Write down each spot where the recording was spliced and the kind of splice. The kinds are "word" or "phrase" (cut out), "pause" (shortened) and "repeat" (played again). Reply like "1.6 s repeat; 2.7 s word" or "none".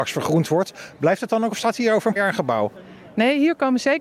1.5 s word; 2.2 s word